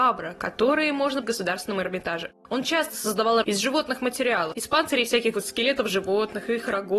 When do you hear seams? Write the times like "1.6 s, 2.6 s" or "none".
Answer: 1.2 s, 3.4 s, 5.3 s